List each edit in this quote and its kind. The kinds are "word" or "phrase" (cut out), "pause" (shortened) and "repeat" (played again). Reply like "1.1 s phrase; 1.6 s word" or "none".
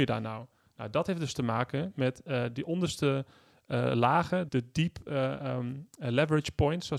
4.5 s word

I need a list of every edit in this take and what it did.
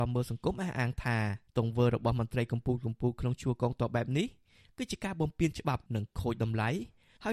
1.5 s pause; 5.9 s pause

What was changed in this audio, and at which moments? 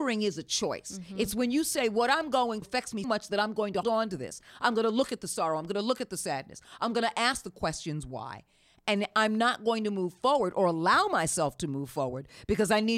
2.6 s word; 3.0 s word; 3.8 s word

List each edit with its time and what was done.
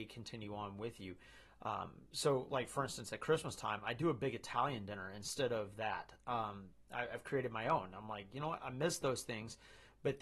none

